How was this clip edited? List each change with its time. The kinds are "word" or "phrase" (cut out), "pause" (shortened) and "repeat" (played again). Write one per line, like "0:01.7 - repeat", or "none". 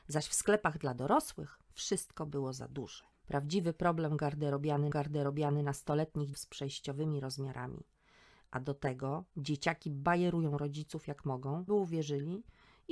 0:03.1 - pause
0:04.9 - repeat
0:06.3 - phrase
0:11.7 - word